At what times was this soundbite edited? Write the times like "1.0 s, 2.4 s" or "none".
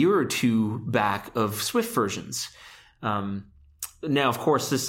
none